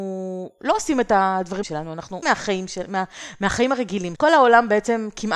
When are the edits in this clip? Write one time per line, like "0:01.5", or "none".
0:01.6
0:02.2
0:04.2